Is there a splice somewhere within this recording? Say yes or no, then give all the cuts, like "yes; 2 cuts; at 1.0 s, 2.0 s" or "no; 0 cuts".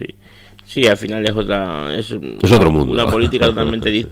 no; 0 cuts